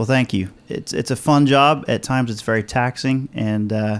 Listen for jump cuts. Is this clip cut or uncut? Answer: uncut